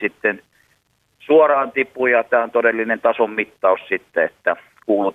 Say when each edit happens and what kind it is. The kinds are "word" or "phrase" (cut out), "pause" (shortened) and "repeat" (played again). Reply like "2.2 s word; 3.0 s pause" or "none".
none

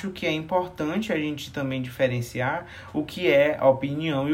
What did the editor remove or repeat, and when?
none

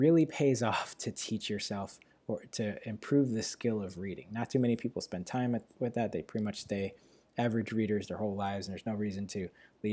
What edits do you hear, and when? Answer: none

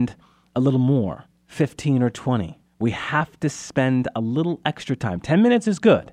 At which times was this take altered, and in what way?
1.3 s pause; 2.7 s pause

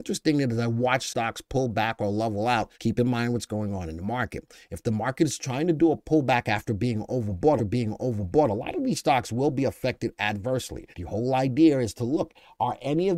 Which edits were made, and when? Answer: 1.1 s phrase; 2.7 s pause; 7.6 s repeat; 10.9 s pause

